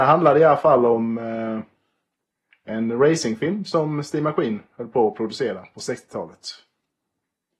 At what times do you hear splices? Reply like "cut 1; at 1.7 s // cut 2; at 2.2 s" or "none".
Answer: none